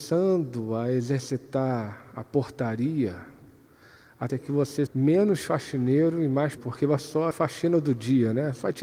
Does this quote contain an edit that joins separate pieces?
yes; 5 cuts; at 4.3 s, 4.9 s, 6.6 s, 7.0 s, 7.3 s

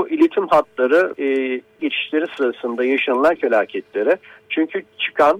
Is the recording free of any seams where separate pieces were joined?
no; 3 cuts; at 1.1 s, 1.8 s, 3.4 s

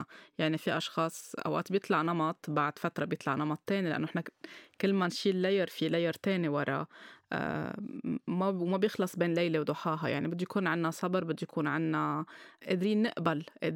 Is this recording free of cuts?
yes; 0 cuts

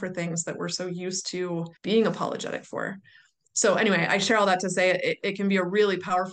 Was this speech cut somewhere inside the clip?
yes; 1 cut; at 1.8 s

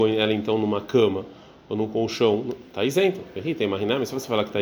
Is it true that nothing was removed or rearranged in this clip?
yes; 0 cuts

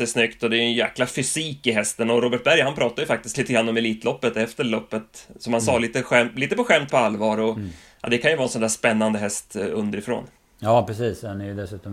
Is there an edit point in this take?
yes; 1 cut; at 6.9 s

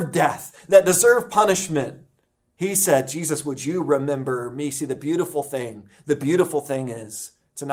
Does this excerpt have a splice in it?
no; 0 cuts

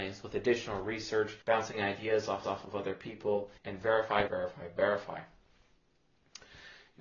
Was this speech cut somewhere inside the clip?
yes; 4 cuts; at 1.4 s, 2.4 s, 3.6 s, 4.3 s

